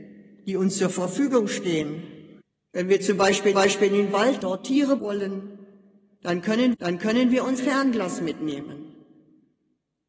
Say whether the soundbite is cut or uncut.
cut